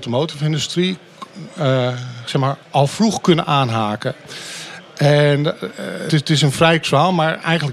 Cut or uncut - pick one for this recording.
cut